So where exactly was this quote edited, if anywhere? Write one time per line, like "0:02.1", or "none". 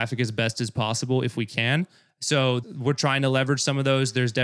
0:02.6